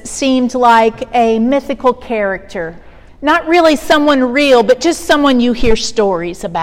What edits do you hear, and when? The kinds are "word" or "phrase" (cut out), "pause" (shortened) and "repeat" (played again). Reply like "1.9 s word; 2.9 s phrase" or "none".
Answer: 3.1 s pause